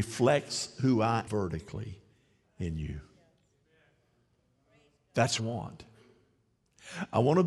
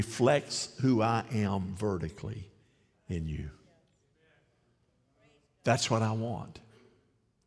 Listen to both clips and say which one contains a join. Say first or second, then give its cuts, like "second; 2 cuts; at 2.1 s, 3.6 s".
first; 2 cuts; at 1.3 s, 5.4 s